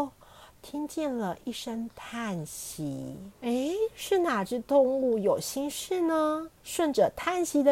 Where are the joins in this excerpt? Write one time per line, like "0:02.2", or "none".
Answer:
0:03.3
0:06.6